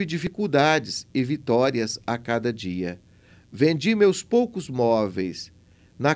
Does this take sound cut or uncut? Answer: uncut